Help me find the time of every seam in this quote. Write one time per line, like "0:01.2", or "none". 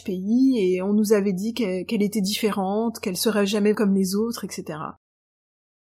0:03.7